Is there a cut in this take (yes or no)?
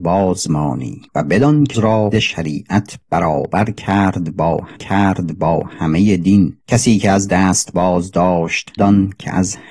yes